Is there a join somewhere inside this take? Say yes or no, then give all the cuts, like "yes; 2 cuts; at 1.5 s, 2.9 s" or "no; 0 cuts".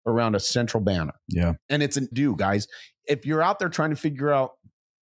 yes; 2 cuts; at 1.2 s, 2.1 s